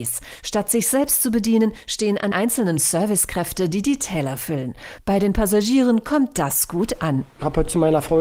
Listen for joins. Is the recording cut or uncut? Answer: cut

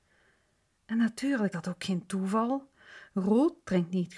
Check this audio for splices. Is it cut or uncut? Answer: cut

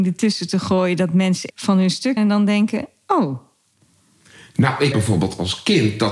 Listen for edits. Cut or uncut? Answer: cut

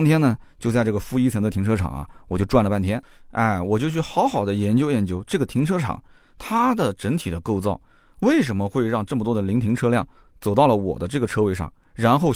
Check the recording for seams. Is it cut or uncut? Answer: uncut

